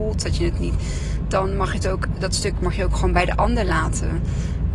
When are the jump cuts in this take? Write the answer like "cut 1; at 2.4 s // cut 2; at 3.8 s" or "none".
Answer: cut 1; at 2.2 s